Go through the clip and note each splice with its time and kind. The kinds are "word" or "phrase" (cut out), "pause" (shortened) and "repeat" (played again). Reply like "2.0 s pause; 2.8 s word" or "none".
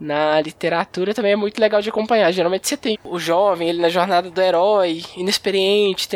2.9 s word